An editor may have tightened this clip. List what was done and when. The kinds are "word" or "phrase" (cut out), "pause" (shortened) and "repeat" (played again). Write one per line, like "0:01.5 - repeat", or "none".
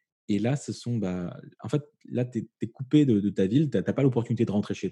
none